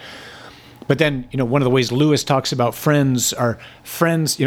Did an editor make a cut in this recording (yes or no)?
no